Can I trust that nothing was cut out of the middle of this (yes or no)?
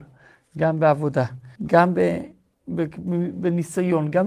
no